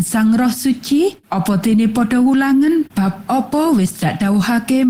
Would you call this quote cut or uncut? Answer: cut